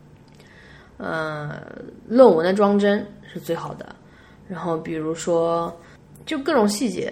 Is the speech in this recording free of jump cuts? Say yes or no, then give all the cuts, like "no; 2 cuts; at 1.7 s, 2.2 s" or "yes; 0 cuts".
yes; 0 cuts